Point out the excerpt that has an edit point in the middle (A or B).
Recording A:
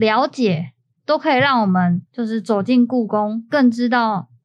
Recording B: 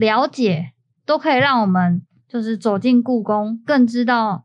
A